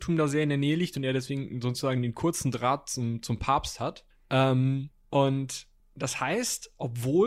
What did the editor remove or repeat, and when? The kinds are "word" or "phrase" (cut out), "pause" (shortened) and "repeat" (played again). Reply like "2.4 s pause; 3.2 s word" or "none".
none